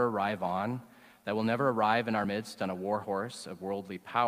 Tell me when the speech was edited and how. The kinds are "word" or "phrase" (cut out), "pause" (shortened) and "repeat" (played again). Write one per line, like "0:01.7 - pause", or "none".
none